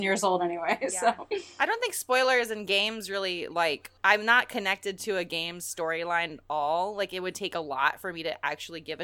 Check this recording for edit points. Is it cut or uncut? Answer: cut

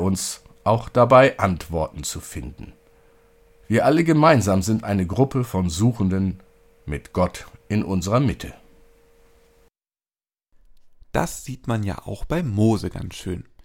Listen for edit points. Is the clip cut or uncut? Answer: uncut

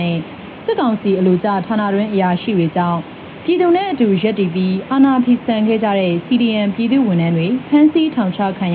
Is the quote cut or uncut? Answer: uncut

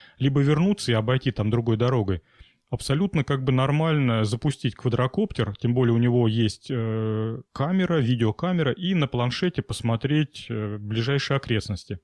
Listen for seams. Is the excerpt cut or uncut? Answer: cut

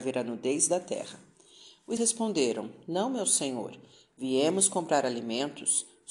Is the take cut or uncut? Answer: cut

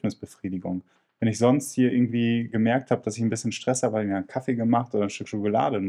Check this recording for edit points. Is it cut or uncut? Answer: uncut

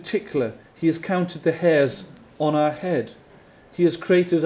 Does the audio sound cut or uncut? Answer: uncut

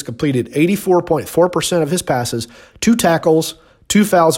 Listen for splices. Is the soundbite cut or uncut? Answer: uncut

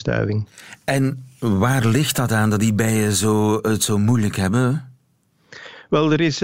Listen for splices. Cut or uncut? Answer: uncut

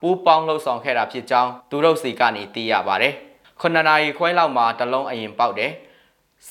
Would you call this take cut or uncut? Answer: cut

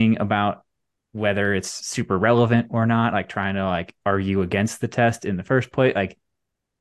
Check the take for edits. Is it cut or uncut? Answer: uncut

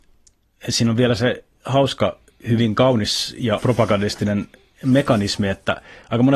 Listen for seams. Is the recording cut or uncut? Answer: cut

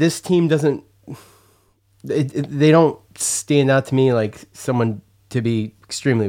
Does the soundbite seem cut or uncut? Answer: cut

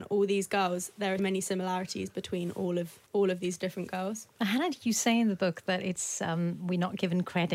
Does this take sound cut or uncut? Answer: cut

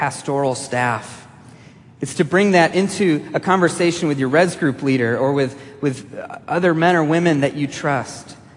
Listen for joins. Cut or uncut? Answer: uncut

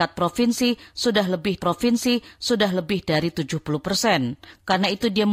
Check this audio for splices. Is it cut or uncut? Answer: cut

